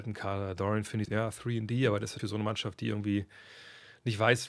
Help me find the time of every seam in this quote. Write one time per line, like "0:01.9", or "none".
0:01.1
0:02.2